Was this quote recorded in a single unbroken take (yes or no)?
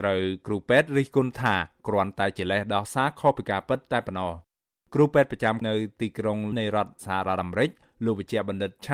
no